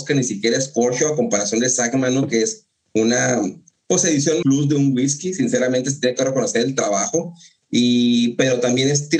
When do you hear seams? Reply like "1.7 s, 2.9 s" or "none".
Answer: 4.4 s